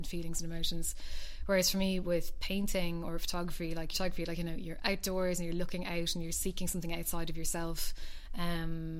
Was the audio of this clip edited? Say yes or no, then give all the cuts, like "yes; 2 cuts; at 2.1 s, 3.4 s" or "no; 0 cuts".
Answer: yes; 1 cut; at 3.9 s